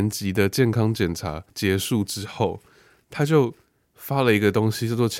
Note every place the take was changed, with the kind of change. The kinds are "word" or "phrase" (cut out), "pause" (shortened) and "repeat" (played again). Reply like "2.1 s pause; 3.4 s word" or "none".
1.5 s pause